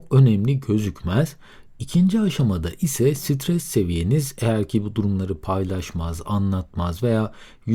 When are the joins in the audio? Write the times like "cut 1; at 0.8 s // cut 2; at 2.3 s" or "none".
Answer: none